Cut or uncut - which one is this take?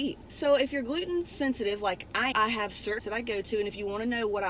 cut